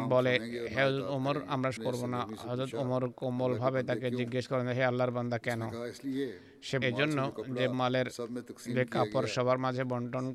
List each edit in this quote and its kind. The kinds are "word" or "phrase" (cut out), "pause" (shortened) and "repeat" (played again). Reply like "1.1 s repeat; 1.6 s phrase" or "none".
1.8 s phrase; 6.8 s phrase; 7.7 s word